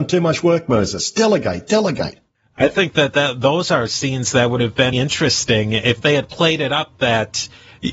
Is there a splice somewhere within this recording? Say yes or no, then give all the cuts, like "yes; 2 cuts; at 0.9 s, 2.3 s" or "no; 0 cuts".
yes; 1 cut; at 4.9 s